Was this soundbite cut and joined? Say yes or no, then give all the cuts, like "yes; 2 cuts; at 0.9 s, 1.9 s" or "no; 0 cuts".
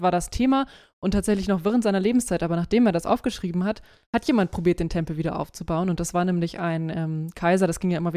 no; 0 cuts